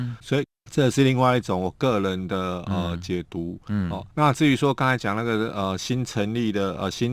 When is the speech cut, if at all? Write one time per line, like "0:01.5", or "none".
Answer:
0:04.1